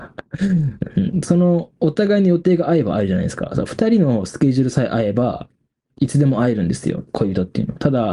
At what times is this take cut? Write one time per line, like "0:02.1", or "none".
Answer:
0:05.6